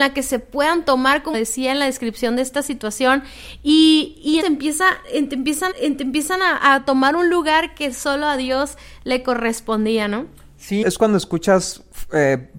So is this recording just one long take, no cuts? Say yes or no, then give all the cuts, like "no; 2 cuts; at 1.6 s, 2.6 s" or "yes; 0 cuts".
no; 4 cuts; at 1.3 s, 4.4 s, 5.7 s, 10.8 s